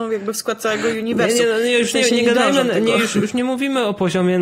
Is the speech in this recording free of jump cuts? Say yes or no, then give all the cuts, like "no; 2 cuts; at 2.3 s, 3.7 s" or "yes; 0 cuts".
yes; 0 cuts